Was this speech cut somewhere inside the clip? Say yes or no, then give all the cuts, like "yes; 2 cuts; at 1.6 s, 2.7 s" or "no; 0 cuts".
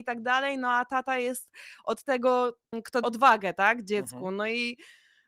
yes; 1 cut; at 3.0 s